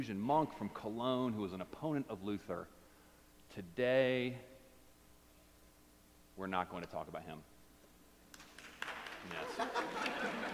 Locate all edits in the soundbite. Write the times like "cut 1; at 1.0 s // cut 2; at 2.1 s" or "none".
none

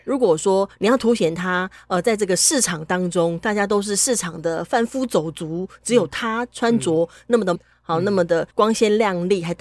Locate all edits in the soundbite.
cut 1; at 7.5 s // cut 2; at 8.5 s

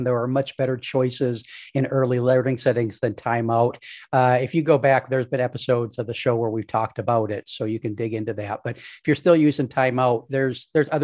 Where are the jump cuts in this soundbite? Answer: none

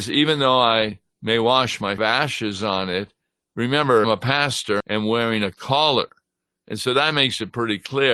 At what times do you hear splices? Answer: cut 1; at 2.0 s // cut 2; at 4.0 s // cut 3; at 4.8 s

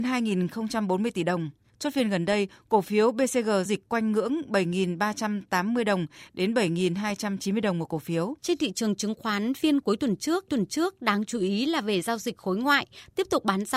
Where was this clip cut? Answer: cut 1; at 3.7 s // cut 2; at 8.4 s // cut 3; at 10.5 s

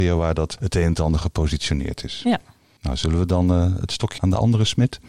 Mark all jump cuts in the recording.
cut 1; at 4.2 s

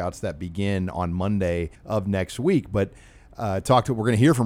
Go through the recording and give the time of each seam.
cut 1; at 1.8 s

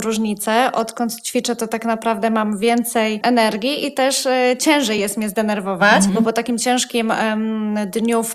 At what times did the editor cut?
none

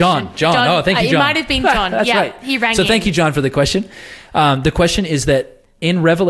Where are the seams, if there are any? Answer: none

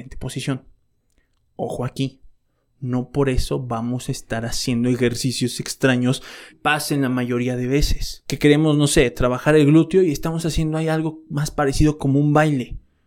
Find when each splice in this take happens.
cut 1; at 6.5 s

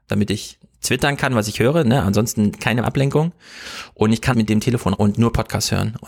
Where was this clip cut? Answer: cut 1; at 2.8 s // cut 2; at 4.3 s // cut 3; at 4.9 s

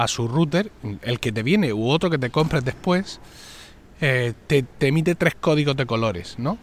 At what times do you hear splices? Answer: none

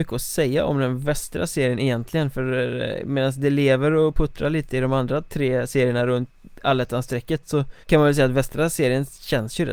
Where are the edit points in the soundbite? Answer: cut 1; at 7.8 s

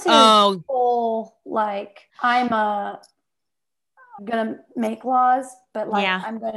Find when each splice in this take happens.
cut 1; at 2.1 s // cut 2; at 4.2 s

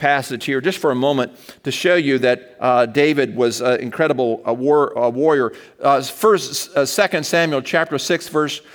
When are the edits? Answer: none

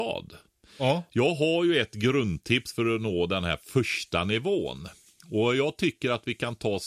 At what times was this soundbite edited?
none

